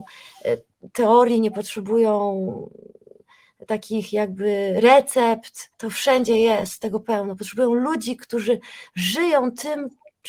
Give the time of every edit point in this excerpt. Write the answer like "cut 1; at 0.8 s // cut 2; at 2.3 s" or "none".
cut 1; at 5.7 s